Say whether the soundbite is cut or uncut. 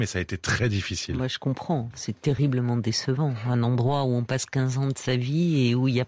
uncut